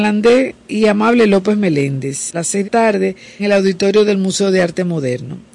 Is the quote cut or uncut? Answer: cut